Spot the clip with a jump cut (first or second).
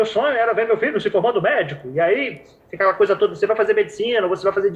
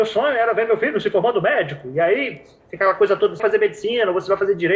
second